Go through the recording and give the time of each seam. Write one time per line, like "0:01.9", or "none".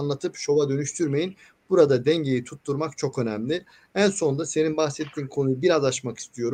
none